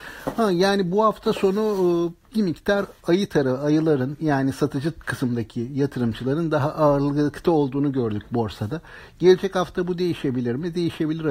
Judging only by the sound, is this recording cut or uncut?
cut